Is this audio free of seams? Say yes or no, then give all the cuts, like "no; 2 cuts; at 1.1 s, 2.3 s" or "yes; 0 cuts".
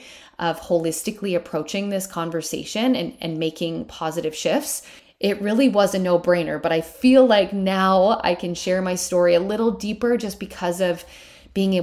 no; 1 cut; at 5.0 s